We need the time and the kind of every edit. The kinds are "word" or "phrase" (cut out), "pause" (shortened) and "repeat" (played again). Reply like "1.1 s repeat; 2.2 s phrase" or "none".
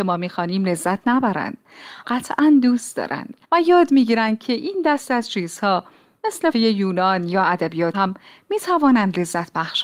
2.0 s phrase; 3.4 s pause; 6.5 s word; 7.9 s word